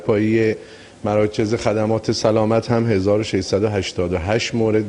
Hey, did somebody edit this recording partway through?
no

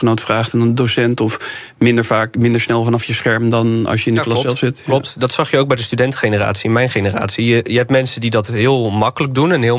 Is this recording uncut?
yes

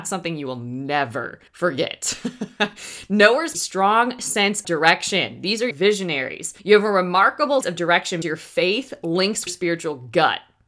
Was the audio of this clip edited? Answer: yes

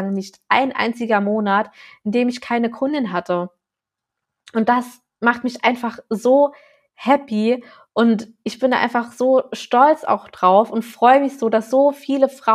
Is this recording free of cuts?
yes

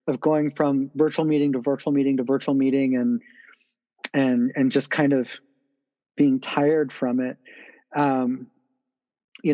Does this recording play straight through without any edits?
yes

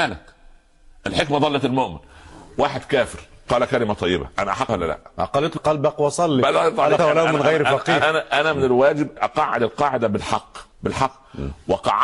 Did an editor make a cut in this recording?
yes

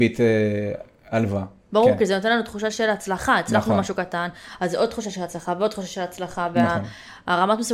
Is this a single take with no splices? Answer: yes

